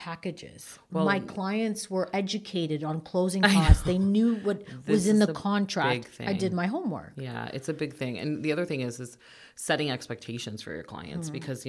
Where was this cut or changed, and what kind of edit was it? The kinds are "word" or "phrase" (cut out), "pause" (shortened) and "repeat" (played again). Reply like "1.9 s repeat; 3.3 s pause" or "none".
none